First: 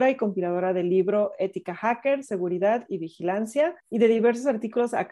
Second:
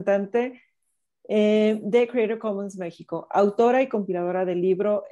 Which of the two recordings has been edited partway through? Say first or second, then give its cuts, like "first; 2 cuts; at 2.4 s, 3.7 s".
first; 1 cut; at 3.8 s